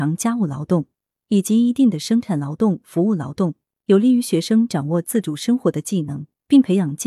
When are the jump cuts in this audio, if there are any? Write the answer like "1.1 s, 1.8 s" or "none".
none